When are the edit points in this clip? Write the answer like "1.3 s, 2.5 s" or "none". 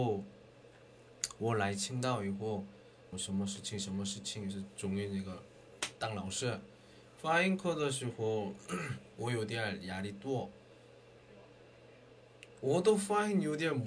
3.1 s